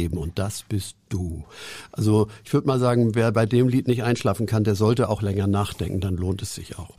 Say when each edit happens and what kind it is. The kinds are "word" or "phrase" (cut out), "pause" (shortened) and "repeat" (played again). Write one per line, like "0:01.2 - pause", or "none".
none